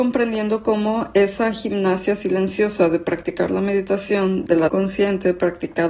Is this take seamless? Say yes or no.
no